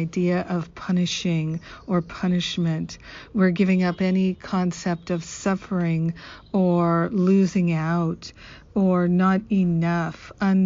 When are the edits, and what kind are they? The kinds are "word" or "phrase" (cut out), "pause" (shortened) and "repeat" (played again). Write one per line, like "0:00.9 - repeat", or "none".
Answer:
none